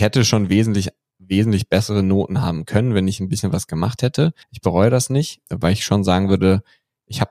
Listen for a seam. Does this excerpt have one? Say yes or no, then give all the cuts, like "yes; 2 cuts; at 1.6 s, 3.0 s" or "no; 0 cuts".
yes; 2 cuts; at 4.4 s, 5.5 s